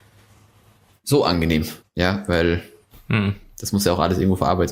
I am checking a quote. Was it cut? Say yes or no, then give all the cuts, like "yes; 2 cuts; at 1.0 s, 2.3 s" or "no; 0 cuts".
yes; 1 cut; at 1.8 s